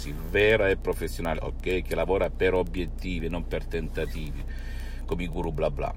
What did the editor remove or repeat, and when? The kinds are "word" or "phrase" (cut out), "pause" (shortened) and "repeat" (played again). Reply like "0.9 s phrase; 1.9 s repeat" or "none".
1.4 s phrase